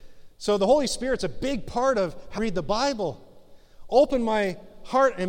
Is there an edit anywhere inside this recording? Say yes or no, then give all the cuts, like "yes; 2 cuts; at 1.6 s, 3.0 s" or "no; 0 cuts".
yes; 1 cut; at 2.4 s